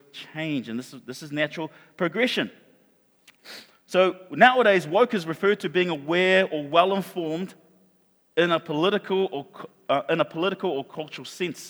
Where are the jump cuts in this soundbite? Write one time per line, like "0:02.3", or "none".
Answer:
none